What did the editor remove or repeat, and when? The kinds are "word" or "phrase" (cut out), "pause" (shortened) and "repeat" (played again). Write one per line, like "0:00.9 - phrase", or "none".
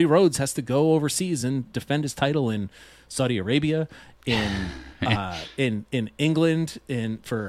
none